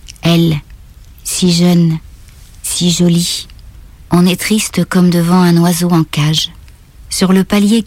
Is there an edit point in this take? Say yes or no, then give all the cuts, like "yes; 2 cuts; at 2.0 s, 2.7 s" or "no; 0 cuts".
no; 0 cuts